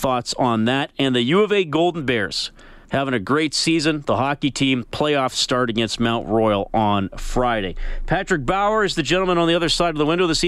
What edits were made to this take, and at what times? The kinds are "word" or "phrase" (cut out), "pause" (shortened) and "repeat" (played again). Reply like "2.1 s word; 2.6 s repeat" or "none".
2.8 s pause